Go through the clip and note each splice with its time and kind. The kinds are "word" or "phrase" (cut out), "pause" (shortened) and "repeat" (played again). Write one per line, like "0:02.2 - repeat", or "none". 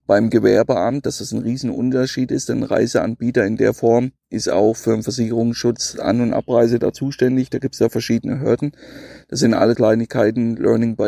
0:09.7 - word